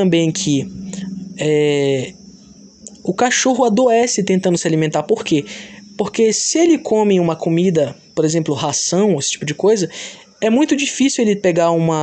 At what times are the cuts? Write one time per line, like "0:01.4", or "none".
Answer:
none